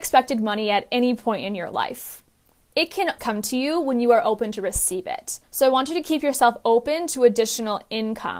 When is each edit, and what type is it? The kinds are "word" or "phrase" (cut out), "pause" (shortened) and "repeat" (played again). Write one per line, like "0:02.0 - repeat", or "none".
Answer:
0:03.2 - word
0:05.4 - pause